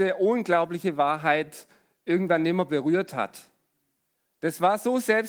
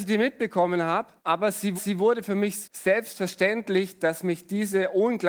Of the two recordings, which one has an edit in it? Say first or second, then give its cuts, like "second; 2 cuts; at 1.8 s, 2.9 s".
second; 3 cuts; at 1.2 s, 1.8 s, 2.6 s